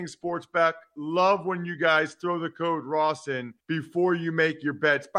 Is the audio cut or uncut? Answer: cut